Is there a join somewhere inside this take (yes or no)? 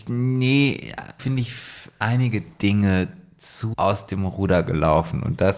yes